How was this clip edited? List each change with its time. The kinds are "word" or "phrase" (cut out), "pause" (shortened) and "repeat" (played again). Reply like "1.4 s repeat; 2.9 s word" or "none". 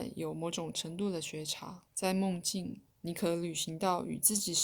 1.9 s pause; 2.9 s pause

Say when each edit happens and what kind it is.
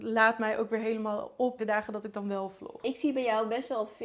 1.6 s word

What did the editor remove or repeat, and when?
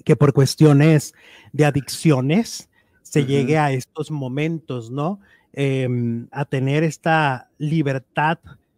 6.3 s word

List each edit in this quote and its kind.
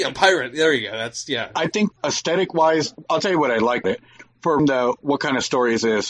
1.9 s word; 3.8 s word; 4.6 s word

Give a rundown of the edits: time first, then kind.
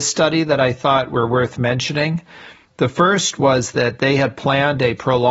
none

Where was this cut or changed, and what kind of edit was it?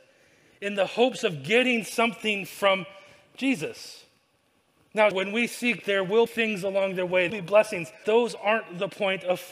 5.1 s word; 5.8 s word; 6.3 s word; 7.3 s phrase; 8.0 s word

